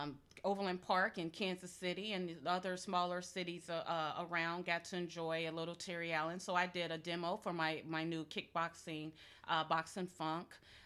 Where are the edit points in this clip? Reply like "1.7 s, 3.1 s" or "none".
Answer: none